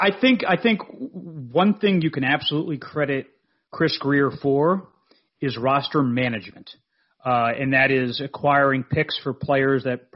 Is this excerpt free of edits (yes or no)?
yes